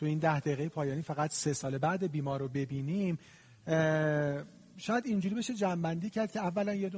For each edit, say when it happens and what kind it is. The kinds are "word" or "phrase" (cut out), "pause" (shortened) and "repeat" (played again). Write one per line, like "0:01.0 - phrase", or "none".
none